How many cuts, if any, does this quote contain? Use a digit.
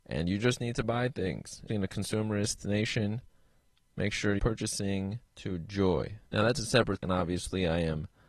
5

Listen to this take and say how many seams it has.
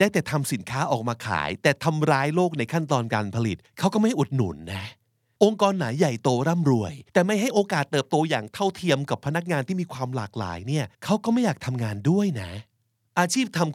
3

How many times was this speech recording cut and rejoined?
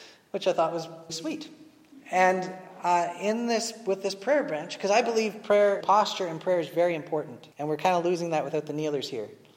3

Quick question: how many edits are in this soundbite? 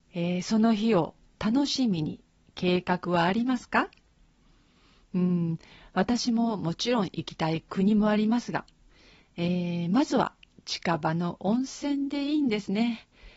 0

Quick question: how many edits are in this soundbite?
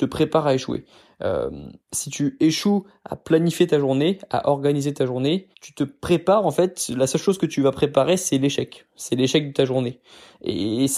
2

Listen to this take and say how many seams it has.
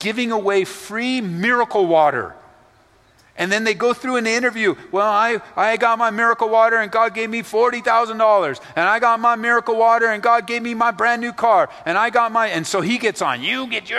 0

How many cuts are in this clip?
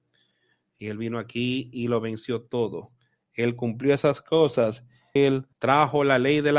2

